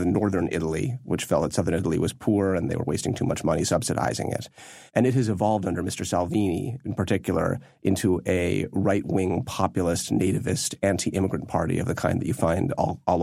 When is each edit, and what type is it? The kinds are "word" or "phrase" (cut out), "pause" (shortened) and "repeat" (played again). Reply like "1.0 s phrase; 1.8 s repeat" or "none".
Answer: 4.9 s pause